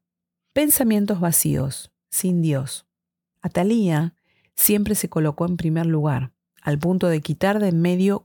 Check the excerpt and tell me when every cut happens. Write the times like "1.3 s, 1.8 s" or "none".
none